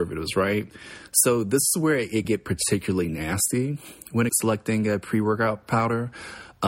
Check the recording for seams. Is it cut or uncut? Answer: cut